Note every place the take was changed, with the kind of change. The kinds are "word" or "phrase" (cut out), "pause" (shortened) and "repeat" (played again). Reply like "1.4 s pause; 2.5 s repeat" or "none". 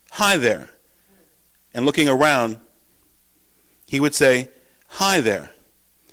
none